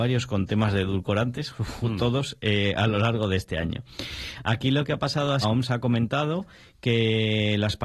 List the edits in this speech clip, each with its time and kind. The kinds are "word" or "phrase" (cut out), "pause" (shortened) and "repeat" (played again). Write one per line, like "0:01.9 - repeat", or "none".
0:05.4 - phrase

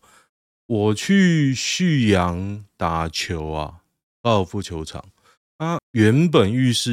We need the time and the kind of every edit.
0:05.8 - word

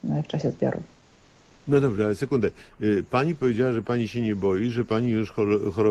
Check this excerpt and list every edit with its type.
none

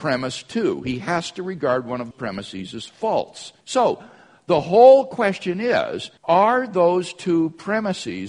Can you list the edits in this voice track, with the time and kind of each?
0:02.1 - word
0:03.6 - pause
0:06.2 - pause

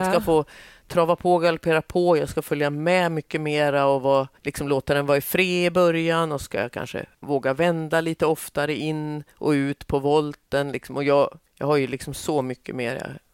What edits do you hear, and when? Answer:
0:04.4 - pause
0:07.1 - pause
0:09.3 - pause
0:11.5 - pause

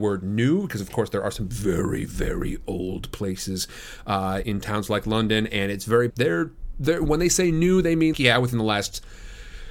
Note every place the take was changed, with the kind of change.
0:04.4 - word
0:06.1 - phrase
0:08.1 - word

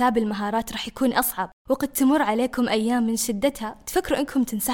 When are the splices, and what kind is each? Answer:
0:01.6 - pause

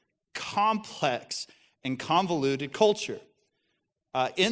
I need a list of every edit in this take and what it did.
none

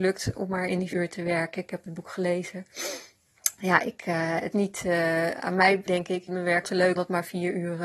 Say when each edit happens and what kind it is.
0:00.9 - word
0:04.5 - word
0:05.9 - word
0:06.3 - word
0:06.6 - word
0:07.0 - word

